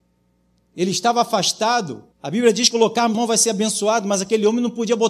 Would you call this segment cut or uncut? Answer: cut